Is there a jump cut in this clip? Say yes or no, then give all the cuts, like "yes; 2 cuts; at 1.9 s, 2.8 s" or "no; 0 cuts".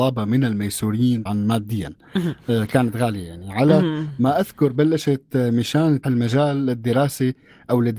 yes; 2 cuts; at 1.3 s, 6.0 s